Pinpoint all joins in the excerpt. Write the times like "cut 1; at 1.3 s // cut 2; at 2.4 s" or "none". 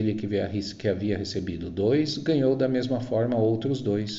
none